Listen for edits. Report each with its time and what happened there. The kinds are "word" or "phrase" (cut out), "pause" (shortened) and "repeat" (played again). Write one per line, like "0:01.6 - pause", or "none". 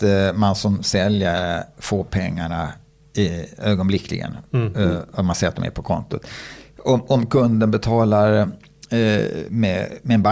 none